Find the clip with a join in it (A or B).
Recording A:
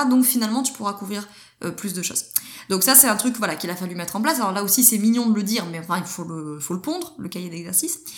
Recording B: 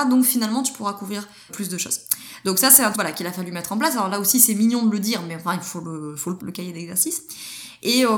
B